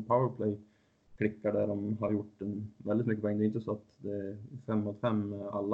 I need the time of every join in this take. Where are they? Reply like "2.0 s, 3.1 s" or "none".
none